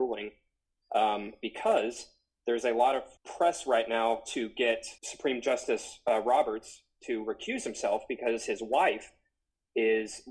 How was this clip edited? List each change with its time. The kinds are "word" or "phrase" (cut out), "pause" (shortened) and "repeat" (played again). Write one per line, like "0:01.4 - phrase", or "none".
0:03.2 - pause
0:05.0 - pause